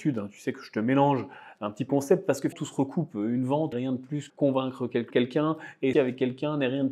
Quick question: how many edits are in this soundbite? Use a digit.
6